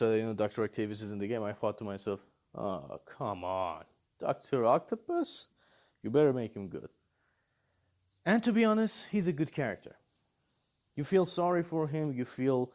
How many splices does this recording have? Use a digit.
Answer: 0